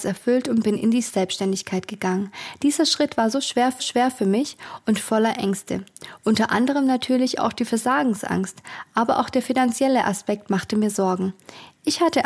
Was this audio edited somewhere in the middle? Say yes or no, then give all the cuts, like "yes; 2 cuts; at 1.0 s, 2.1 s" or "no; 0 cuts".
yes; 1 cut; at 3.8 s